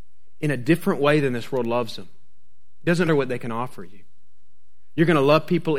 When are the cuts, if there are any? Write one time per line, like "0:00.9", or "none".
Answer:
0:03.1